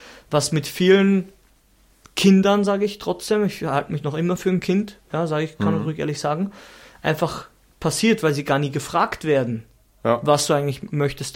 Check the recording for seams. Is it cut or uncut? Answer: uncut